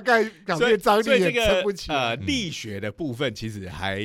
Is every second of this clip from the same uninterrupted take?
yes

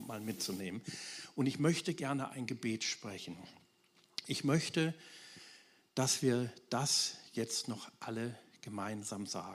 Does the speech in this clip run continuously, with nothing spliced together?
yes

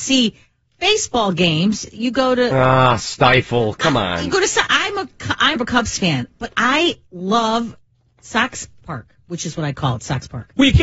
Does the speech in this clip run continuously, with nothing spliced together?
no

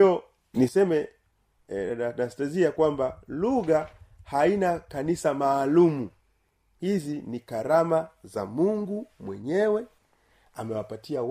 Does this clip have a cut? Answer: no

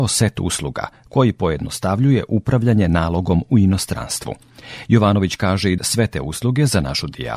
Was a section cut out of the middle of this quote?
yes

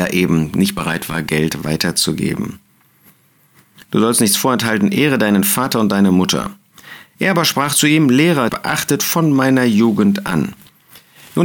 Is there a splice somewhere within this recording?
yes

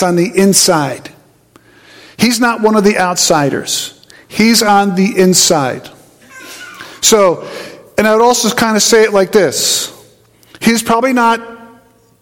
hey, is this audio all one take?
yes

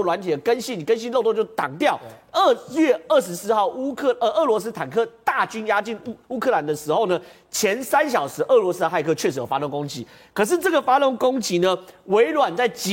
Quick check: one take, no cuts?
yes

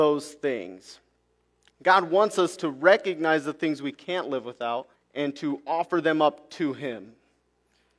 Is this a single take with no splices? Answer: no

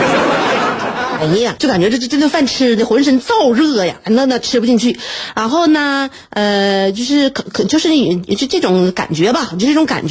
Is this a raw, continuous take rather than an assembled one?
no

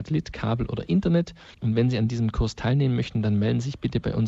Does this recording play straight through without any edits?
no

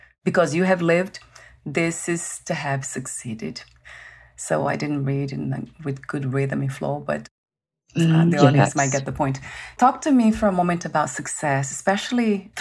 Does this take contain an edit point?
no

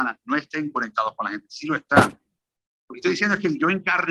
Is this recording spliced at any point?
no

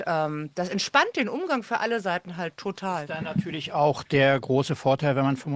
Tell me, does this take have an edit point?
no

